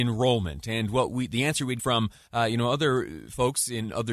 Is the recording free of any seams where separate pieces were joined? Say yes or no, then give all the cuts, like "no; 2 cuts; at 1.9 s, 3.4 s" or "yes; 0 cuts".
no; 1 cut; at 1.8 s